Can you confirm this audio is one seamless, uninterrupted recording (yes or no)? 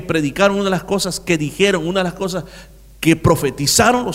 yes